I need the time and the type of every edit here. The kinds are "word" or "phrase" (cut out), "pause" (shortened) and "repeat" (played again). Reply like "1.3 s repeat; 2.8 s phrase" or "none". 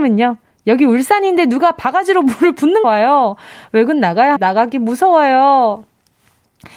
2.8 s phrase; 4.4 s word